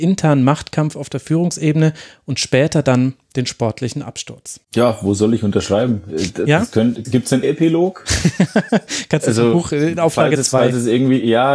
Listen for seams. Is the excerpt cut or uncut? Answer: cut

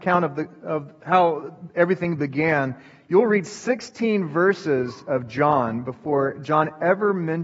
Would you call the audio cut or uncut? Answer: uncut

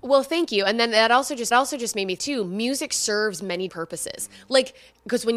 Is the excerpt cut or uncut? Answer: cut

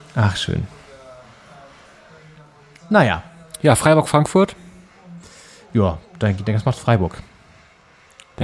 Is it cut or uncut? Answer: uncut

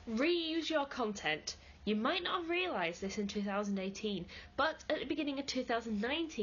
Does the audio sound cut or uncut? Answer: uncut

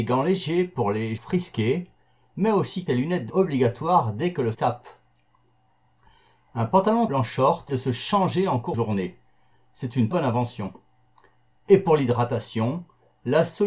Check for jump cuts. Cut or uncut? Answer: cut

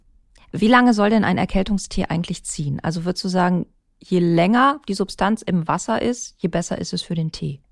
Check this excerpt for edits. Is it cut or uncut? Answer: uncut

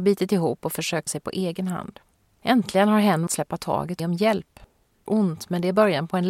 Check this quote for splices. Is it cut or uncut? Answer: cut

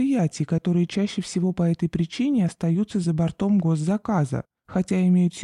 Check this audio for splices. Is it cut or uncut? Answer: uncut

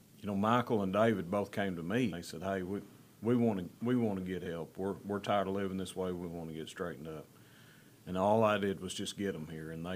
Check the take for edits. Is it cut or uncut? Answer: cut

